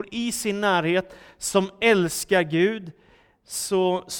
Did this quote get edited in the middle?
no; 0 cuts

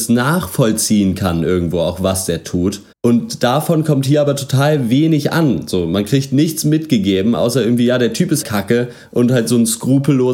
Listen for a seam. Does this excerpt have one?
yes; 2 cuts; at 2.9 s, 8.4 s

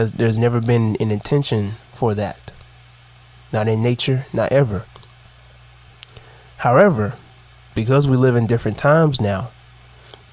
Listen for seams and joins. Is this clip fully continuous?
yes; 0 cuts

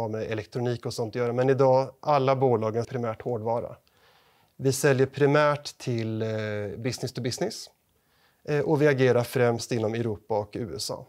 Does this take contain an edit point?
yes; 1 cut; at 2.8 s

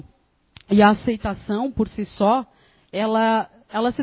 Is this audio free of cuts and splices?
yes; 0 cuts

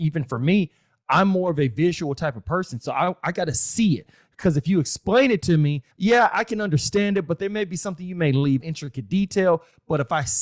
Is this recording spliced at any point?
yes; 2 cuts; at 5.9 s, 8.6 s

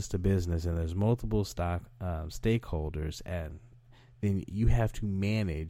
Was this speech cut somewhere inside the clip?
no; 0 cuts

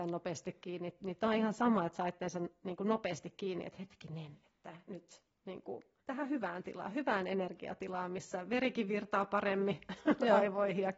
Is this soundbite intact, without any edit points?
no; 1 cut; at 6.0 s

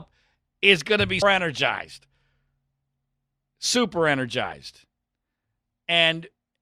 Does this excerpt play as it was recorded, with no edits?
no; 1 cut; at 1.2 s

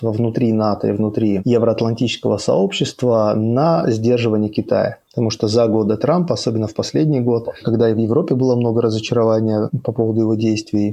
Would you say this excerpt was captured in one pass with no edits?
yes; 0 cuts

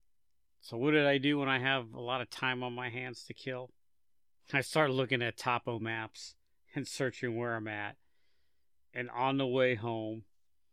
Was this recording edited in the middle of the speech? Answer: no; 0 cuts

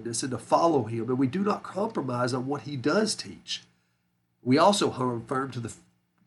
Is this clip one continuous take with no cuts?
yes; 0 cuts

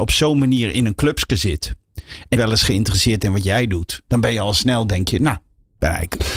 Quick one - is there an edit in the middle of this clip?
yes; 1 cut; at 2.4 s

